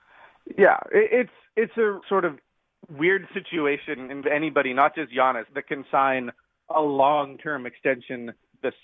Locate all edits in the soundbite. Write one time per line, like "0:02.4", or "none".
0:02.0
0:04.2
0:05.5